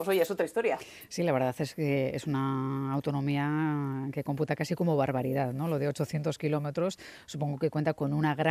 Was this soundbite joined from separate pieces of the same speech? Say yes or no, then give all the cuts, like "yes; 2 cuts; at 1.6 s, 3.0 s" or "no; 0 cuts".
no; 0 cuts